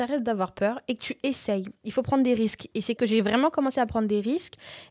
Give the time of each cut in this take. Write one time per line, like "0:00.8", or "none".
0:03.0